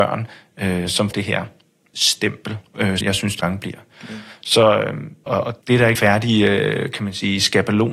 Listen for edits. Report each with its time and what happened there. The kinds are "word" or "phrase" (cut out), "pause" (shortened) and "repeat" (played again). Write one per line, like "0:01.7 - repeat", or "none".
0:01.1 - word
0:03.0 - word
0:03.4 - word
0:05.3 - word
0:05.6 - word
0:05.9 - word